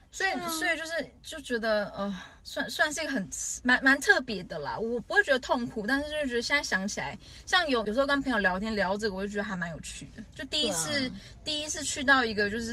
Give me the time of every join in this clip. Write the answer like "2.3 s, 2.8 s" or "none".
2.4 s